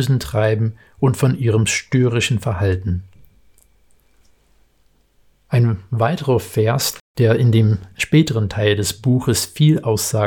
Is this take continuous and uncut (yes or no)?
yes